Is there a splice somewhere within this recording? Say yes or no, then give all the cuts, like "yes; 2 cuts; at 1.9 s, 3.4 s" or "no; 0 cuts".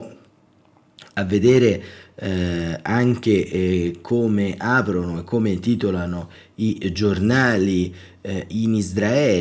no; 0 cuts